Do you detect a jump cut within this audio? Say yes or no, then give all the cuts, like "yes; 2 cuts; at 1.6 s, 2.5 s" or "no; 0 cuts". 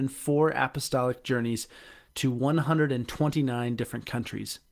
no; 0 cuts